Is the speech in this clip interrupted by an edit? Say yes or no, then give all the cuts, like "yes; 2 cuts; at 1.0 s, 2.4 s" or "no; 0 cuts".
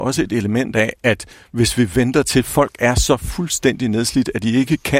no; 0 cuts